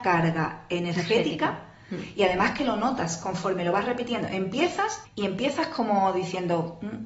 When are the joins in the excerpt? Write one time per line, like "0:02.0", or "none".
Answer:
0:05.0